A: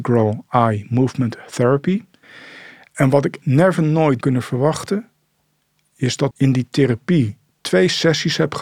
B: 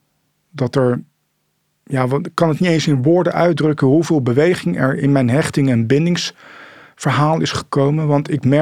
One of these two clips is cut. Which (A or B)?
A